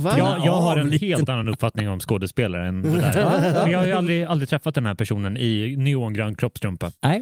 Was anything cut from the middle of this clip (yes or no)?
no